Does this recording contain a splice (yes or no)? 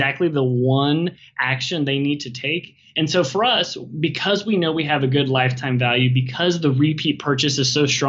no